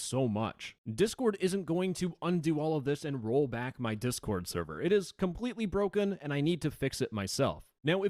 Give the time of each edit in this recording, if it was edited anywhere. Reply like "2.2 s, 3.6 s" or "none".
none